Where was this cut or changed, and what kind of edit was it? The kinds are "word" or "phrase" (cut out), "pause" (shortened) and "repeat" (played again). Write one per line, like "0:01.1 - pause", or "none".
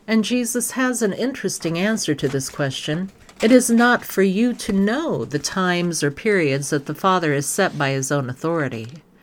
0:03.2 - pause